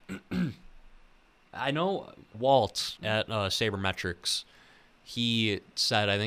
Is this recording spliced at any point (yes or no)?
yes